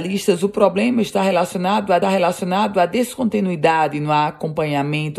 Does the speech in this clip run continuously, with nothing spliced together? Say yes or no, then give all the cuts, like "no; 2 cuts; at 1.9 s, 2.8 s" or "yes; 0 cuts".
no; 1 cut; at 2.0 s